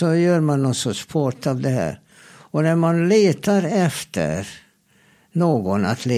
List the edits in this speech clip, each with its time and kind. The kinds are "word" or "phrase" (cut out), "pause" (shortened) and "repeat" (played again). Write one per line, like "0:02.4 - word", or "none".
none